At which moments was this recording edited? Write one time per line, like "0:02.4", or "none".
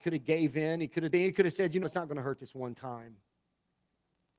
0:01.1
0:01.8